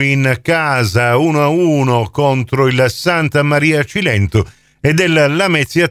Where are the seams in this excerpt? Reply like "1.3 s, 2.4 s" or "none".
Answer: none